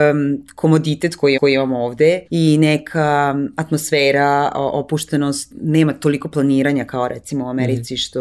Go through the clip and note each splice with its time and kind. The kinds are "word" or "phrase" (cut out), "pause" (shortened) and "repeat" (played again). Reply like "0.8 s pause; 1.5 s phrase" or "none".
1.4 s repeat; 2.3 s pause; 5.5 s word